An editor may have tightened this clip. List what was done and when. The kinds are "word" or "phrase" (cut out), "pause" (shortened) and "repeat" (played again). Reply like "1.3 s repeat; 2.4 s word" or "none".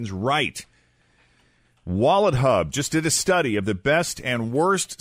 none